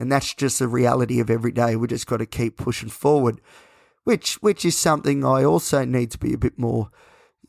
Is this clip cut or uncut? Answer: uncut